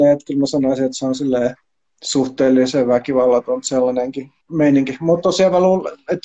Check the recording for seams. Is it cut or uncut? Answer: cut